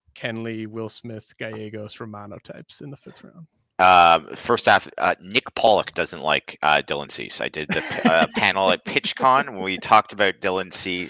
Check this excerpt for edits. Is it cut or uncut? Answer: uncut